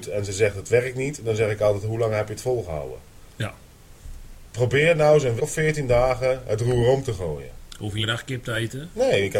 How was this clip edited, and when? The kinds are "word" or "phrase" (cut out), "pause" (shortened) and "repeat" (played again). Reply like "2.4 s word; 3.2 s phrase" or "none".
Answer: 5.4 s word; 8.0 s word